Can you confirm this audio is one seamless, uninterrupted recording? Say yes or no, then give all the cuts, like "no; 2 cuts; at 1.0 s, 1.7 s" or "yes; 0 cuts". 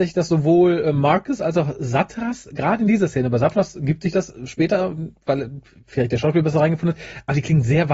yes; 0 cuts